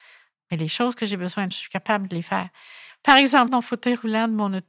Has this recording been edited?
yes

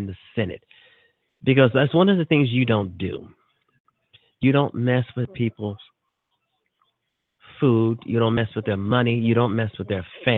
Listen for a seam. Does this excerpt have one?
no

